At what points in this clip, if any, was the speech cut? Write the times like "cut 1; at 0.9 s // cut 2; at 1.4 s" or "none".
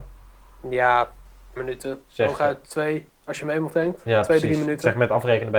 cut 1; at 1.6 s // cut 2; at 3.7 s